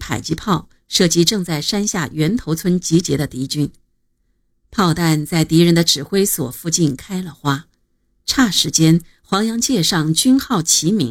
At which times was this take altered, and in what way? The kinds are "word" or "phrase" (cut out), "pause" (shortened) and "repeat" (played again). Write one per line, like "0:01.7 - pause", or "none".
none